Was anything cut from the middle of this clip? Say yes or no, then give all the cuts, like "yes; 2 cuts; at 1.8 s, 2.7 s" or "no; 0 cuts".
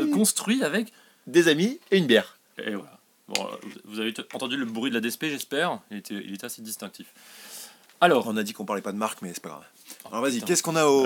no; 0 cuts